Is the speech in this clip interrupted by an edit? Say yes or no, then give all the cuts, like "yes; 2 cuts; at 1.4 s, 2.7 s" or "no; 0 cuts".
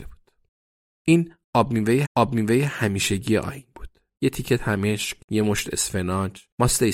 yes; 2 cuts; at 2.0 s, 5.2 s